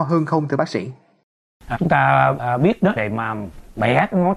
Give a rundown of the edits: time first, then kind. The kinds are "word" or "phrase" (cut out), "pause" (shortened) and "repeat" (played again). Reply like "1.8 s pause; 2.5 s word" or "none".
1.7 s word; 2.4 s word; 3.0 s word